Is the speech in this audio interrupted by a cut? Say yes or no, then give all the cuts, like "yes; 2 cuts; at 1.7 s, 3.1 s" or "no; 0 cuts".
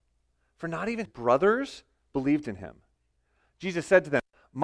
yes; 1 cut; at 1.1 s